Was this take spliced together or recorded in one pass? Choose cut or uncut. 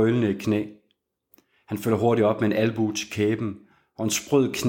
uncut